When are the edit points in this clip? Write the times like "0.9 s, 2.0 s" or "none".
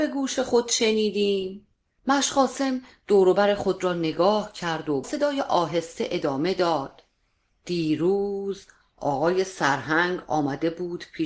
5.0 s